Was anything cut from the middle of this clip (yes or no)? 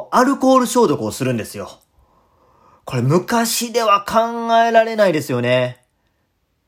no